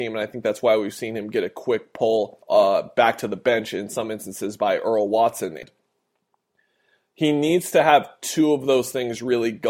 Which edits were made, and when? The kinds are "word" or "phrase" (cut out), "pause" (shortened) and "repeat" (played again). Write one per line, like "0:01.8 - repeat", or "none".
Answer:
0:02.4 - pause